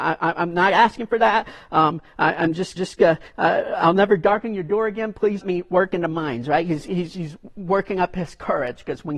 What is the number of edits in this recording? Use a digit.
2